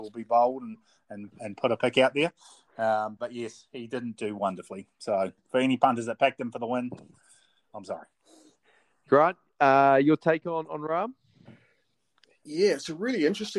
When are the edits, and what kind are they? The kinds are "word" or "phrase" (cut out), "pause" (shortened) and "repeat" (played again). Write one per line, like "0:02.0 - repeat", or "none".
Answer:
none